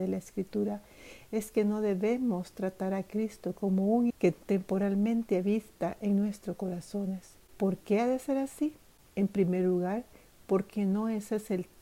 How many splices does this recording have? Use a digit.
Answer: 1